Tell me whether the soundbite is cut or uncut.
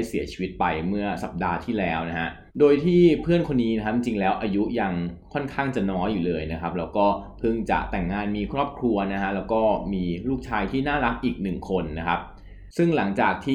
cut